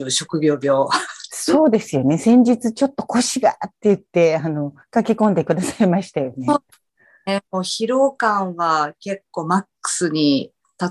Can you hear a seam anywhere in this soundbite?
no; 0 cuts

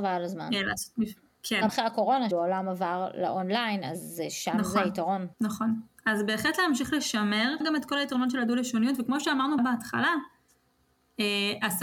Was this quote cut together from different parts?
yes; 5 cuts; at 1.7 s, 2.3 s, 5.3 s, 7.6 s, 9.6 s

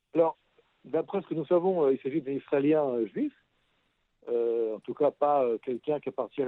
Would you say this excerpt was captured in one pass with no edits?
yes; 0 cuts

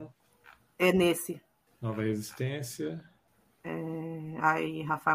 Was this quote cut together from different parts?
yes; 1 cut; at 1.7 s

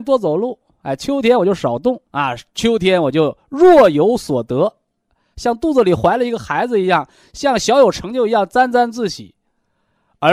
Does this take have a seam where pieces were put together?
yes; 1 cut; at 2.1 s

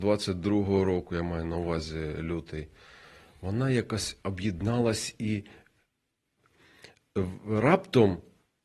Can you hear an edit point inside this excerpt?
no; 0 cuts

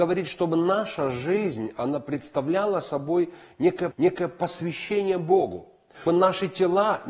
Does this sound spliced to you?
yes; 2 cuts; at 3.9 s, 6.1 s

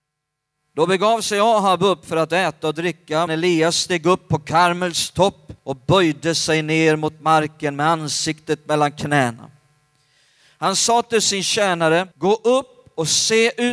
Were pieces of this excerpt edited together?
yes; 3 cuts; at 3.3 s, 5.6 s, 12.1 s

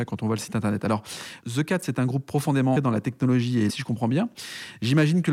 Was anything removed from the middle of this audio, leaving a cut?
yes; 2 cuts; at 2.7 s, 3.7 s

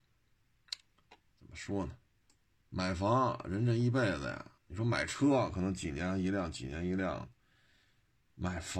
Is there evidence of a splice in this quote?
yes; 2 cuts; at 2.3 s, 4.6 s

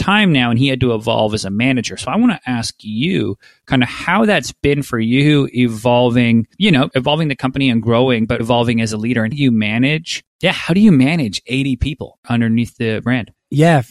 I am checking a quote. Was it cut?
yes; 3 cuts; at 6.5 s, 8.4 s, 9.3 s

